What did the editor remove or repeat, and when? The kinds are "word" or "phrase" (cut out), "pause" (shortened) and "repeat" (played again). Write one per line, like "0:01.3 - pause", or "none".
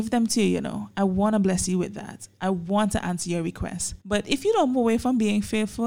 0:04.0 - pause
0:04.7 - word